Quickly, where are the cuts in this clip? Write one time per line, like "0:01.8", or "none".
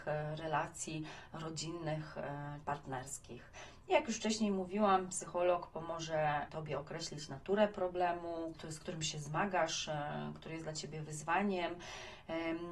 0:02.6
0:06.5
0:08.5